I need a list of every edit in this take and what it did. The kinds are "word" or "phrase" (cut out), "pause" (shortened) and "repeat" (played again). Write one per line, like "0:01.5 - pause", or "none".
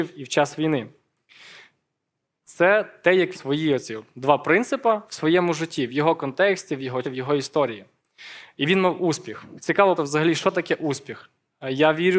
0:03.3 - phrase
0:07.0 - word
0:10.0 - word

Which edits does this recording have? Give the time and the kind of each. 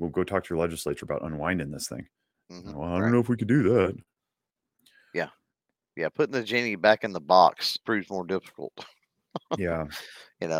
0:07.8 - word

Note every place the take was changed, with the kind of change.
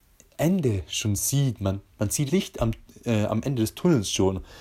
0:02.3 - word

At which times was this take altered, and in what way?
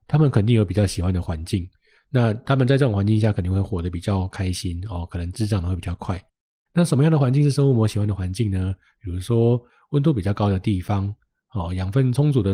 none

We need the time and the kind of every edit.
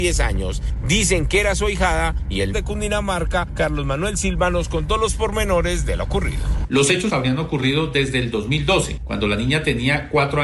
0:02.5 - phrase
0:07.1 - word

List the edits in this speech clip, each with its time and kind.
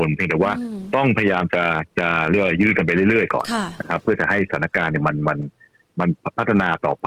none

